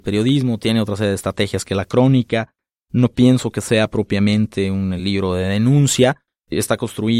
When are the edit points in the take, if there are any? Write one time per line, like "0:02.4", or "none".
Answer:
none